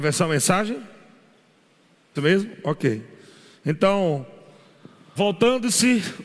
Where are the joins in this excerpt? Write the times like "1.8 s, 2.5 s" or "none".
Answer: 2.2 s, 5.2 s